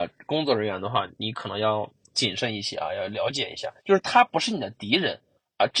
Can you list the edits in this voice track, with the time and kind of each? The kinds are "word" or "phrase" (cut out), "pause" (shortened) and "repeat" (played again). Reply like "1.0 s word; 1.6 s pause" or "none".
3.8 s pause